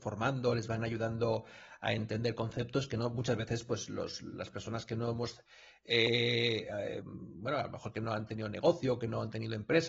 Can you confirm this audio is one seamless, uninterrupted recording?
yes; 0 cuts

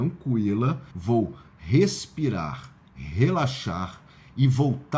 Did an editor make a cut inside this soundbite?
yes; 2 cuts; at 0.9 s, 2.8 s

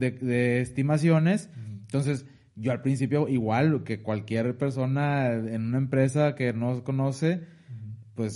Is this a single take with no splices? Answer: yes; 0 cuts

